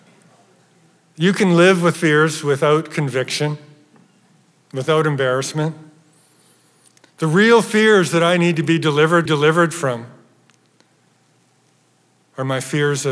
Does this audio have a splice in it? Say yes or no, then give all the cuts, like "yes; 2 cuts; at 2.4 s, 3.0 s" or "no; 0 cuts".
yes; 2 cuts; at 1.9 s, 9.3 s